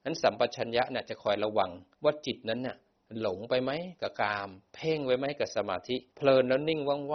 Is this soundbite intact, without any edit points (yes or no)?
no